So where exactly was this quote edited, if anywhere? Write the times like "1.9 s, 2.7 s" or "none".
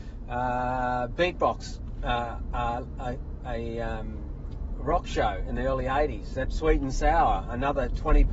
6.4 s